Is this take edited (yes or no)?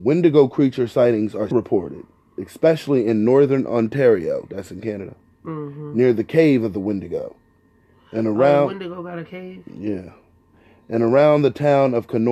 yes